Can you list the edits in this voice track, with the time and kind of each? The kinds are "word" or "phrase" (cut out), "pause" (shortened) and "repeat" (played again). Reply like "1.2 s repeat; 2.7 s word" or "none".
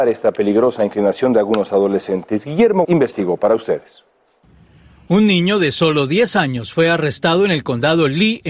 2.8 s word; 4.5 s pause

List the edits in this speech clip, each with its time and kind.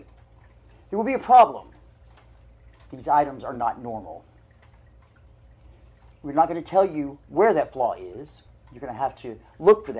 none

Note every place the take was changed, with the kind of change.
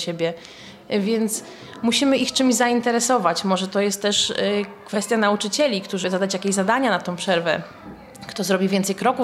6.0 s word

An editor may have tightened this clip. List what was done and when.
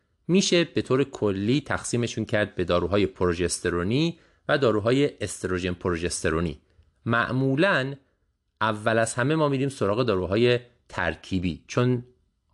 none

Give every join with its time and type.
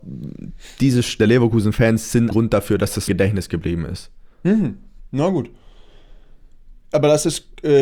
1.2 s phrase; 2.3 s word; 3.1 s phrase; 4.3 s pause

